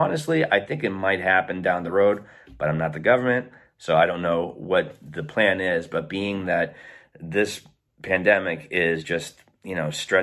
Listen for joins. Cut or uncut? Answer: uncut